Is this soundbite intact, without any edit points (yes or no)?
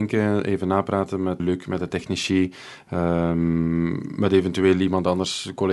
no